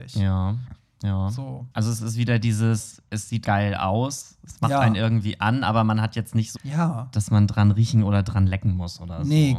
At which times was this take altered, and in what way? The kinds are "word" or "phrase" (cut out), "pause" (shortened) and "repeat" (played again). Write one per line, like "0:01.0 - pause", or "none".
0:01.7 - pause
0:03.4 - word
0:06.6 - phrase